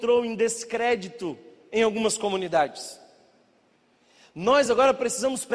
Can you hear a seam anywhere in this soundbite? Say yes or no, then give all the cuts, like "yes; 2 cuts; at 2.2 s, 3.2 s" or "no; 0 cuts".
no; 0 cuts